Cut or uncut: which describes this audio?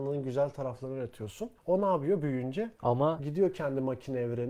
cut